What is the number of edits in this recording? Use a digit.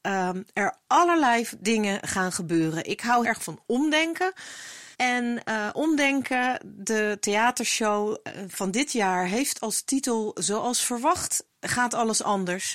3